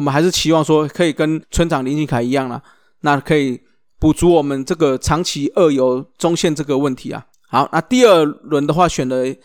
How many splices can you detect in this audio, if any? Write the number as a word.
one